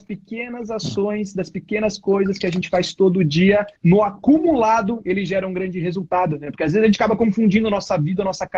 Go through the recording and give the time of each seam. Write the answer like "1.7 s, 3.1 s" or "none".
3.8 s